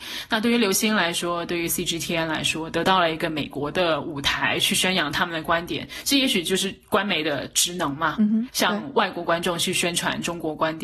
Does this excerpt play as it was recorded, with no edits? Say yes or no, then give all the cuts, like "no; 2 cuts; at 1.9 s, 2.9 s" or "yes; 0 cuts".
yes; 0 cuts